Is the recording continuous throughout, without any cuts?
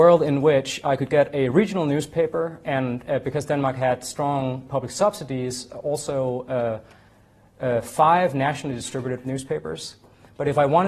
no; 2 cuts; at 2.6 s, 9.2 s

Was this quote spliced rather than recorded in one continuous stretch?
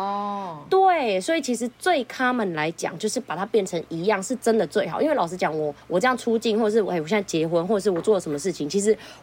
yes; 1 cut; at 5.8 s

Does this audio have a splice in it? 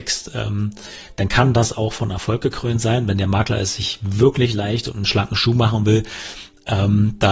no; 0 cuts

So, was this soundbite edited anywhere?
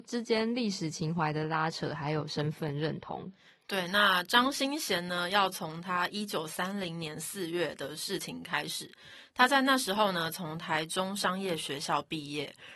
no; 0 cuts

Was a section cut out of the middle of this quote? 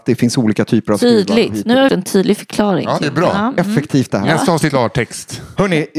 yes; 4 cuts; at 1.9 s, 3.0 s, 4.1 s, 4.7 s

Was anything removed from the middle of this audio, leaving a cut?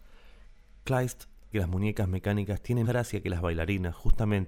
yes; 2 cuts; at 1.5 s, 2.8 s

